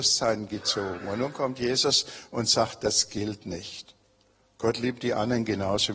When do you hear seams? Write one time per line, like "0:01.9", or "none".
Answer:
0:04.2